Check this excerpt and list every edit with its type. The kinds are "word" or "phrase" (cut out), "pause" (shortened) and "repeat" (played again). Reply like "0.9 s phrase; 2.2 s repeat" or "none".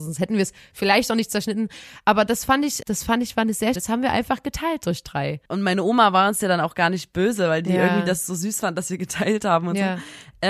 2.8 s word; 3.8 s phrase; 5.5 s pause